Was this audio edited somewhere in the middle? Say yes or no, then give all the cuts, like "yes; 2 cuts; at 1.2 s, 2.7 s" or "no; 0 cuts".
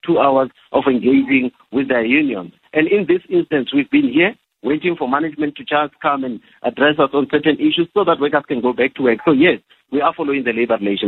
no; 0 cuts